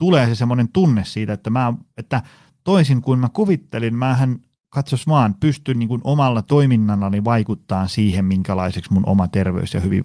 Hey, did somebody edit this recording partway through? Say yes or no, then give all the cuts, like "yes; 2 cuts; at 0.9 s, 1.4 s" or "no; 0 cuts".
no; 0 cuts